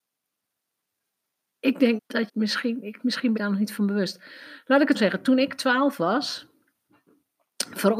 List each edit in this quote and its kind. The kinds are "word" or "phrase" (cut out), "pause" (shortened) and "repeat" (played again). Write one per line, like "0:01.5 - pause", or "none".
0:02.0 - word
0:02.3 - word
0:03.0 - word
0:03.4 - word
0:04.9 - word